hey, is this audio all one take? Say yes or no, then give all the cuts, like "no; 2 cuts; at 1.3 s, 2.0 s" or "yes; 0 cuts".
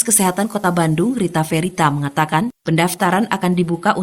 yes; 0 cuts